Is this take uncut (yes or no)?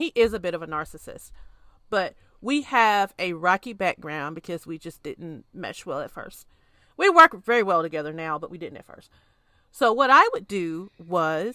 yes